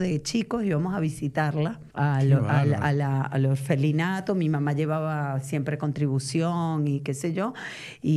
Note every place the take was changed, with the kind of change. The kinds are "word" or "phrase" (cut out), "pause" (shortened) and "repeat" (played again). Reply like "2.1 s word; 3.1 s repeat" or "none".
1.9 s pause